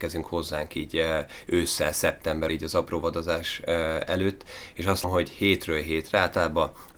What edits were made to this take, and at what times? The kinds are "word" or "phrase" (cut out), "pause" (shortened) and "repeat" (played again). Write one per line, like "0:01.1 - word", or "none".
0:02.5 - word
0:05.0 - word